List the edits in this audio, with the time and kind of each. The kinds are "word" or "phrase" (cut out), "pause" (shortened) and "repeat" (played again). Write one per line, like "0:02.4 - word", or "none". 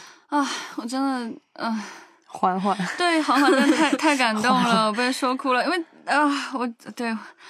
none